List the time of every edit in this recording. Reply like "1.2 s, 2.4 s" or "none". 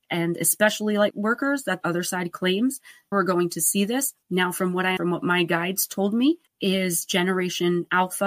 1.1 s, 1.8 s, 3.1 s, 4.2 s, 5.0 s, 6.5 s